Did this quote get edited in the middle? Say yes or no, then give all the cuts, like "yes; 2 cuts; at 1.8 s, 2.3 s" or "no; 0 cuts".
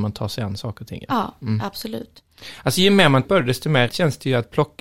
yes; 2 cuts; at 3.2 s, 3.9 s